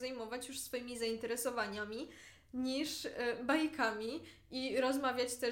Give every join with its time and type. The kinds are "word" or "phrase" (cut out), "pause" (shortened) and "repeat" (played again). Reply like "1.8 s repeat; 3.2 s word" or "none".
none

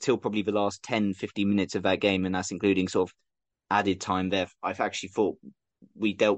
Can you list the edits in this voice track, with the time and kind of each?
none

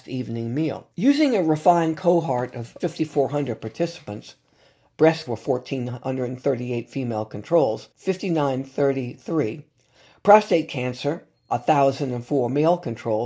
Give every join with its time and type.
0.9 s pause; 2.8 s word; 5.3 s word; 7.9 s pause

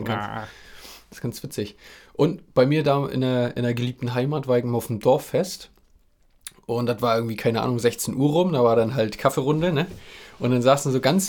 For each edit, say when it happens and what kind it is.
none

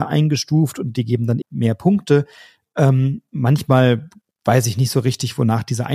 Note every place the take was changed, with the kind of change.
1.4 s word

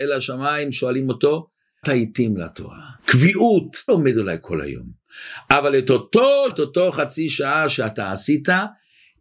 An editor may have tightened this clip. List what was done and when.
1.8 s word; 3.0 s pause; 3.9 s word; 6.5 s word

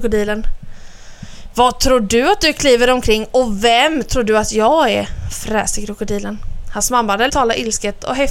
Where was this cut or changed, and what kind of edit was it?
7.3 s phrase

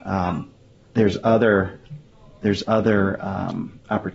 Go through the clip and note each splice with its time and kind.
none

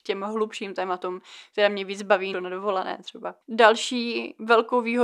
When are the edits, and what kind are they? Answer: 2.3 s phrase; 3.4 s pause

